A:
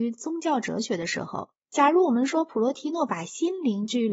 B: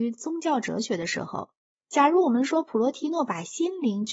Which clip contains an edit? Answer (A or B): A